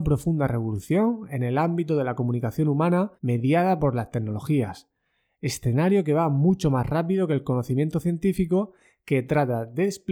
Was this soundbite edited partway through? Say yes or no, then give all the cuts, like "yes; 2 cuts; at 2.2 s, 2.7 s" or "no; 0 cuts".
yes; 1 cut; at 3.2 s